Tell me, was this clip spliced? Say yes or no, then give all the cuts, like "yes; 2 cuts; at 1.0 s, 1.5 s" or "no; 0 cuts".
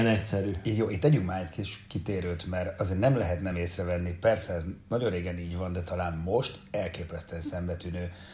no; 0 cuts